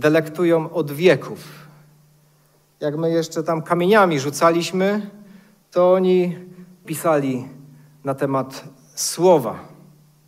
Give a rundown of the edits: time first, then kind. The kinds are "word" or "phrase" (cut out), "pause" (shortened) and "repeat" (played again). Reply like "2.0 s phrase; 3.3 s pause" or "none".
6.8 s word